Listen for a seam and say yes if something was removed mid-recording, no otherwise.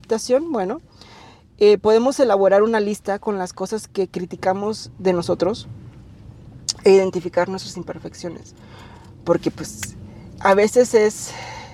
no